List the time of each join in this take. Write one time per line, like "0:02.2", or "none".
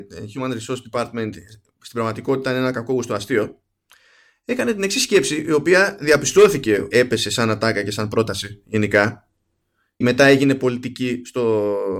0:06.9
0:10.0